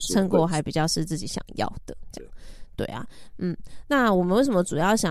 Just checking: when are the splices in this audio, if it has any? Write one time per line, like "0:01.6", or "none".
none